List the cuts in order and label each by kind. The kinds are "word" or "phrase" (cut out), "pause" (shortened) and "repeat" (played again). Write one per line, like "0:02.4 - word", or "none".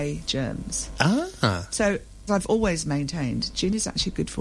0:02.3 - word